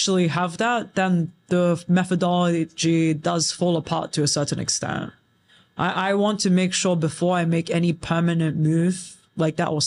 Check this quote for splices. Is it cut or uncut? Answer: uncut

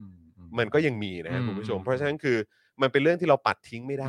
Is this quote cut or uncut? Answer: uncut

